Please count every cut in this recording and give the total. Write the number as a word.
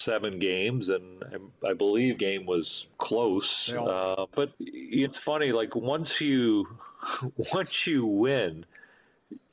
four